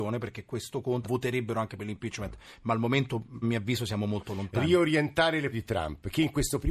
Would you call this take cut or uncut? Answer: cut